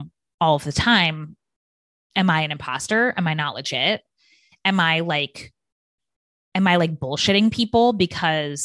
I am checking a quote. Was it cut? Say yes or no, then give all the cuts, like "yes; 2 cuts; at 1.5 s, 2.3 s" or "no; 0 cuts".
no; 0 cuts